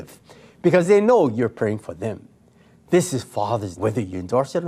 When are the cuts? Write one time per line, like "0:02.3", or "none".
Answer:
0:03.8